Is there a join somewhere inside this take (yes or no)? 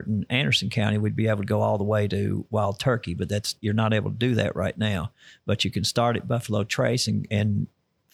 no